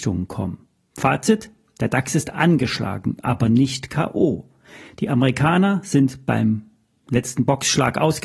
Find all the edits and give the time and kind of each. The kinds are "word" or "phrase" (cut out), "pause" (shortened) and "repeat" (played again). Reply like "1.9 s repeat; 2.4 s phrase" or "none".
none